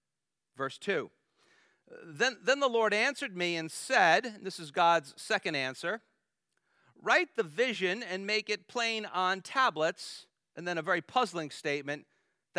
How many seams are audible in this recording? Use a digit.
0